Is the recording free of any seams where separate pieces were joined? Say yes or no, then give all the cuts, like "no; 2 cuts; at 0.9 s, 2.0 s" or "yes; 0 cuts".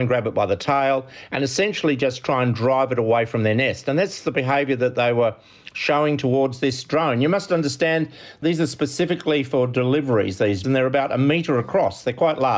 no; 1 cut; at 10.6 s